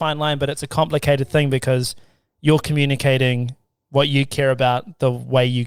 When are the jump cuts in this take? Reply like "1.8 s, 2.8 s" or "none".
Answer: none